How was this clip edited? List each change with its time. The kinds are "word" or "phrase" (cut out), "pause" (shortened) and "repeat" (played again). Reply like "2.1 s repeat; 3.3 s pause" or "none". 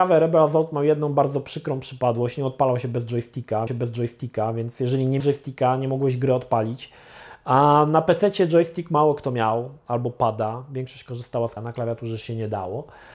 3.7 s repeat; 5.2 s word; 11.6 s word